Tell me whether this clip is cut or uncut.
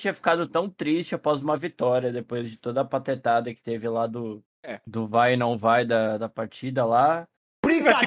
uncut